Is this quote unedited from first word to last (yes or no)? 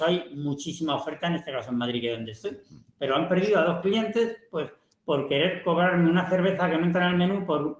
yes